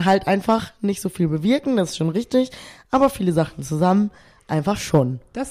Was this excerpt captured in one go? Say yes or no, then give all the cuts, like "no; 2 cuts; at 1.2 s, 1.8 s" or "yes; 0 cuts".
yes; 0 cuts